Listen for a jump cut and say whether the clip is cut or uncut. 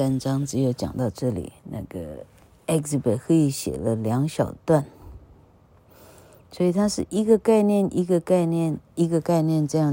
cut